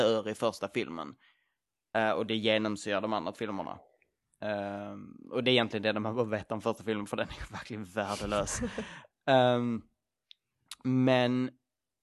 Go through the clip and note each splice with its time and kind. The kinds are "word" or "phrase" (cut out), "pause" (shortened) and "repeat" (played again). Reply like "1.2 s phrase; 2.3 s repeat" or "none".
3.3 s word